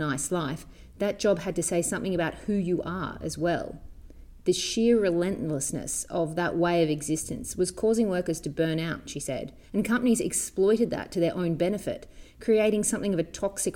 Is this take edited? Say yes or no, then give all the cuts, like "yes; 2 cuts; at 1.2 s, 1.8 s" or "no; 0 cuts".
yes; 1 cut; at 9.6 s